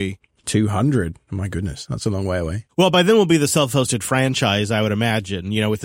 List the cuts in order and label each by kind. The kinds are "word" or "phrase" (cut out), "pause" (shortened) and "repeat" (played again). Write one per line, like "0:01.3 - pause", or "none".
none